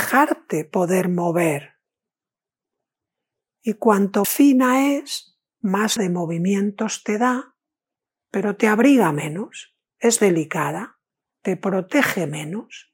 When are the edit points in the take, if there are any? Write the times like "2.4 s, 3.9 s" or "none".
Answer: 4.2 s, 6.0 s, 7.9 s, 10.2 s, 11.1 s